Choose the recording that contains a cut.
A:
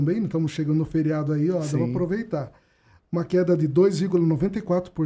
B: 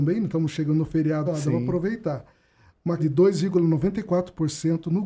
B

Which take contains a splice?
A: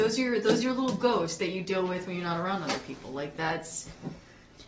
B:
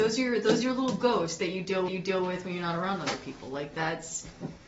B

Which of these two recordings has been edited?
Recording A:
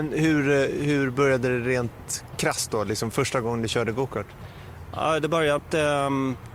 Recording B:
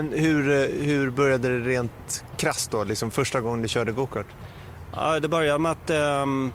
A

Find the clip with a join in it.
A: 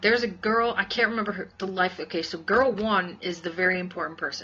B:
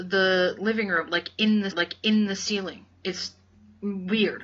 B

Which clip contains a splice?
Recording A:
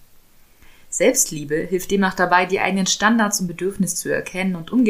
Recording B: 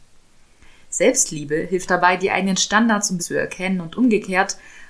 B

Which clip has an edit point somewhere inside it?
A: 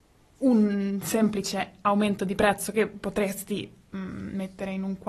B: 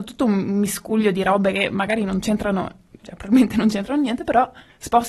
B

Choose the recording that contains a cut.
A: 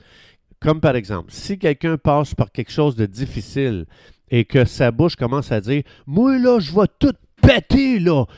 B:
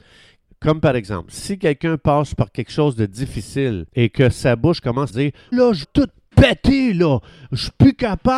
B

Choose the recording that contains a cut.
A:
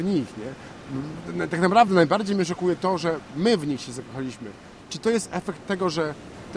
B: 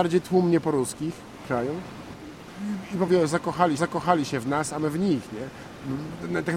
B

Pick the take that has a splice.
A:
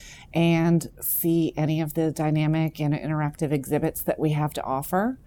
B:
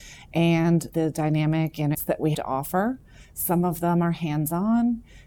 B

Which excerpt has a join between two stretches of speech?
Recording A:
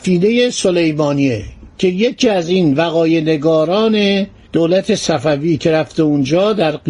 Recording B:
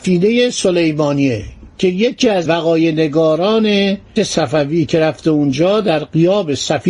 B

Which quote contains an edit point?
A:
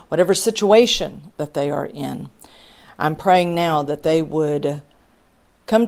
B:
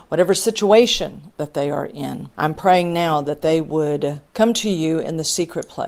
B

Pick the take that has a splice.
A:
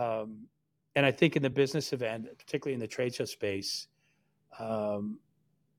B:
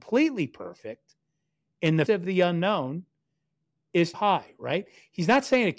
B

